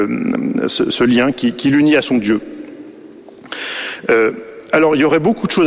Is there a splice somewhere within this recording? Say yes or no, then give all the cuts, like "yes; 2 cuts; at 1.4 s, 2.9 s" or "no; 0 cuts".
no; 0 cuts